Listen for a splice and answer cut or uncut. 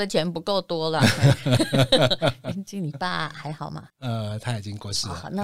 cut